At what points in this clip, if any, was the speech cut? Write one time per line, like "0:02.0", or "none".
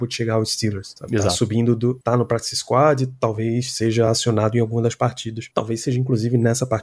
none

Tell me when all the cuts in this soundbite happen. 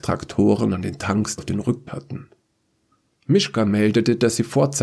0:01.4
0:01.9

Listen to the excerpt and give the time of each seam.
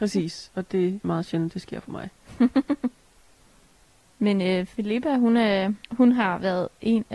0:01.0
0:05.8

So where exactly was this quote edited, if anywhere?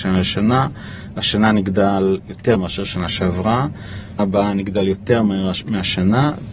0:02.5
0:04.2

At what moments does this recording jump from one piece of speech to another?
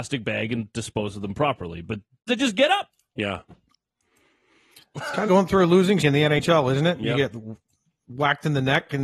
0:02.3
0:05.3
0:06.0

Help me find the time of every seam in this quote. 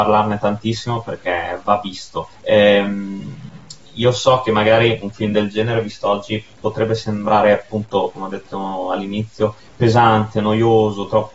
0:02.3
0:09.6

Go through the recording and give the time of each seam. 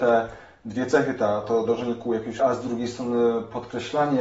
0:01.4
0:02.4

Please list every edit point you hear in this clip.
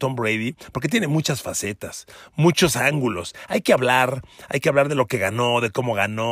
none

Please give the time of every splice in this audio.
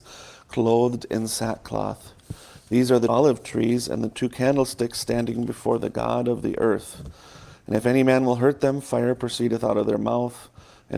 0:03.1

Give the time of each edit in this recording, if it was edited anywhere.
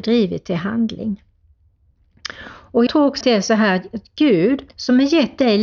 0:02.9
0:03.2
0:04.7

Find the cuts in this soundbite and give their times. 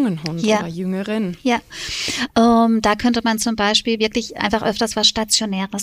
none

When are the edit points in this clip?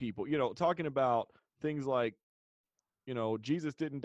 0:01.4

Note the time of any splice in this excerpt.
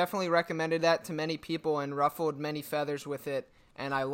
none

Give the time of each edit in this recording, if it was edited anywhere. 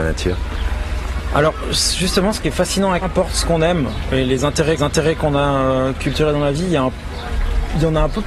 0:03.0
0:04.8

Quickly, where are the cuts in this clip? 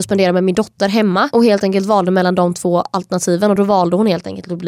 none

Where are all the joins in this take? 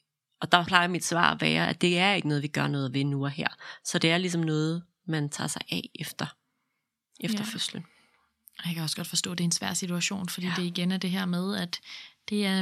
none

